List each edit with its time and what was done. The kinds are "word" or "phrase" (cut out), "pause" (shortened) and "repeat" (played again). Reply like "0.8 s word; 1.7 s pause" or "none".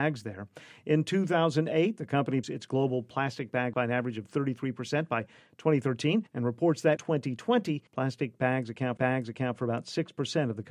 2.4 s phrase; 3.7 s word; 6.3 s pause; 7.0 s word; 7.9 s pause; 9.0 s repeat